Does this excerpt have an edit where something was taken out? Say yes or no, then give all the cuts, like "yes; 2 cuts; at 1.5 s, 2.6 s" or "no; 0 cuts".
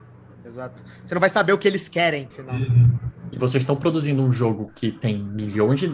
no; 0 cuts